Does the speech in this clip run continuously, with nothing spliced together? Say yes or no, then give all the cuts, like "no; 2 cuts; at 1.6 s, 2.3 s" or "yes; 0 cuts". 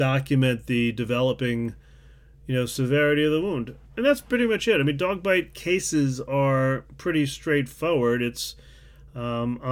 yes; 0 cuts